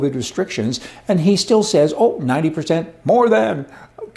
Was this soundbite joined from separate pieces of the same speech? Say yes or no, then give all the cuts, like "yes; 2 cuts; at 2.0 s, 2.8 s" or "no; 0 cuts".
no; 0 cuts